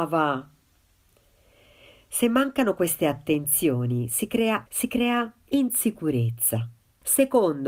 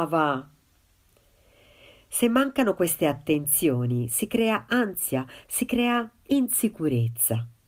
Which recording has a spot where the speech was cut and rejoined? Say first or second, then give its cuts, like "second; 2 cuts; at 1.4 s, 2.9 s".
first; 1 cut; at 4.7 s